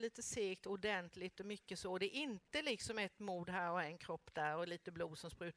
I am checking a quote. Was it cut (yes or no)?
no